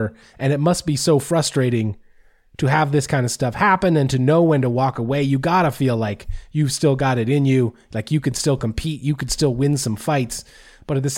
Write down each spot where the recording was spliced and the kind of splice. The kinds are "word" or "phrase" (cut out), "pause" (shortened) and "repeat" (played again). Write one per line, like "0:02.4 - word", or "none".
none